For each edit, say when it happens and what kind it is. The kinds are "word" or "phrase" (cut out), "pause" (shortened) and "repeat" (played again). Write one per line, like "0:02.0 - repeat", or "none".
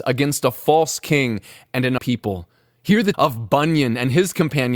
0:02.0 - word
0:03.1 - word